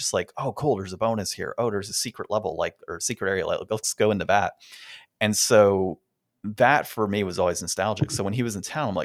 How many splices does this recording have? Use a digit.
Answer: 0